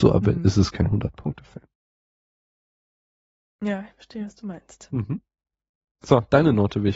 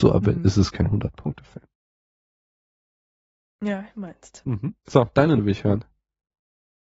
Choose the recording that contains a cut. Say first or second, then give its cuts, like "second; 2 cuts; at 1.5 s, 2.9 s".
second; 3 cuts; at 3.9 s, 4.8 s, 5.4 s